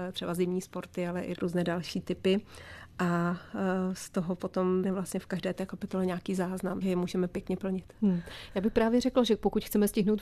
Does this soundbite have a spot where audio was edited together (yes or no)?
yes